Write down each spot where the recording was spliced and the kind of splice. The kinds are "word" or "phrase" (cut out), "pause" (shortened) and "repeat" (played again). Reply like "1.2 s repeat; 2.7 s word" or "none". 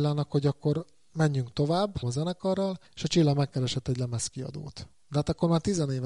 2.0 s word; 2.9 s pause

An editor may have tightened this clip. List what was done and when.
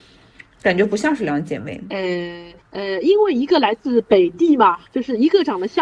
2.6 s pause; 4.8 s pause

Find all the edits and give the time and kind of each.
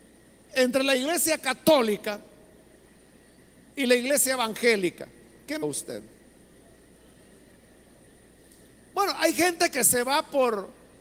5.6 s word

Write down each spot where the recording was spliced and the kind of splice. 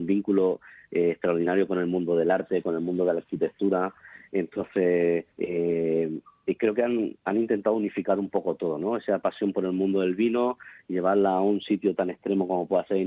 5.3 s pause

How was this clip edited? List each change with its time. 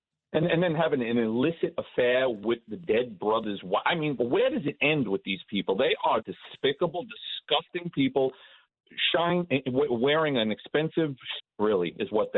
4.2 s word; 6.2 s word; 11.4 s word

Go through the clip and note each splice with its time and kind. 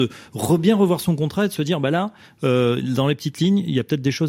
none

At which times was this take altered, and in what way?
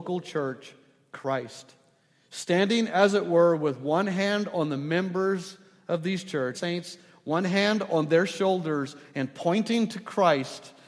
6.5 s phrase

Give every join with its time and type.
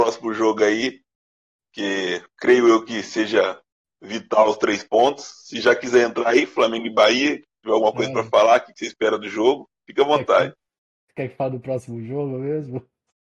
2.3 s pause

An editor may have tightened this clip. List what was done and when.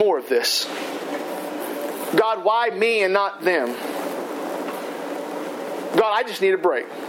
none

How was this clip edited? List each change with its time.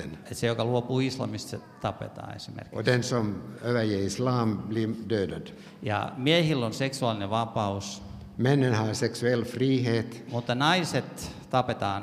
none

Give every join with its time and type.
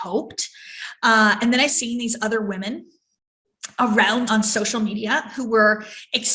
1.7 s word; 4.3 s word

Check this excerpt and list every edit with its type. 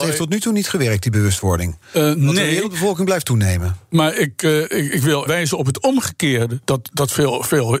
5.3 s word

